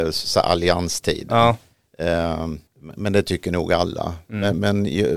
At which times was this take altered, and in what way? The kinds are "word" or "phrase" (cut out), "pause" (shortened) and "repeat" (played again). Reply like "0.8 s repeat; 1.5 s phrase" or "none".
2.7 s pause